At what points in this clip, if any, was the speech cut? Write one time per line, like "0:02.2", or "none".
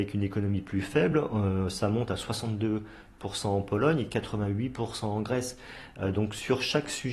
none